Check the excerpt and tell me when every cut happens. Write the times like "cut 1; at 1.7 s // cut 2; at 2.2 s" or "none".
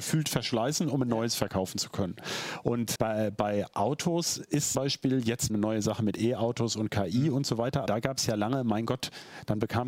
cut 1; at 3.0 s // cut 2; at 4.7 s // cut 3; at 5.5 s // cut 4; at 7.9 s